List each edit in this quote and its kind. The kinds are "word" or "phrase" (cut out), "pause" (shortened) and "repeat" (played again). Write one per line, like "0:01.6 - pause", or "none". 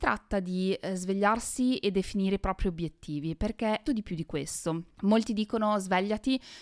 0:03.9 - word